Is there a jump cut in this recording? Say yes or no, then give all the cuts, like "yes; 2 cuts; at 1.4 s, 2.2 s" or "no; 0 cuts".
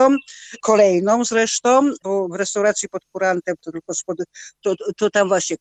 no; 0 cuts